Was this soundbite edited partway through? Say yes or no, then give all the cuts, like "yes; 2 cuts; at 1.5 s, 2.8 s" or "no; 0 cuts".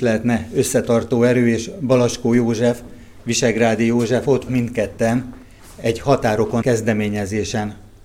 yes; 2 cuts; at 4.5 s, 6.6 s